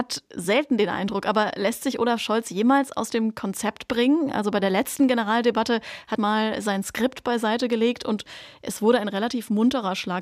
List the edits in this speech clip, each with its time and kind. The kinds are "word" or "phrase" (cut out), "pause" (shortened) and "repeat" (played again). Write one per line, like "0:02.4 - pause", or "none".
0:06.2 - phrase